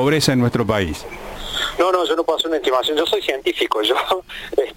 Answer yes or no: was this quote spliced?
no